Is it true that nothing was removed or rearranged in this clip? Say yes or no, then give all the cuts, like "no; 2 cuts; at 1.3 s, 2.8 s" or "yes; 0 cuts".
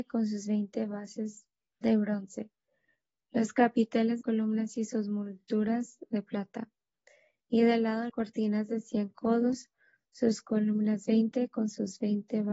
no; 3 cuts; at 1.7 s, 4.2 s, 8.1 s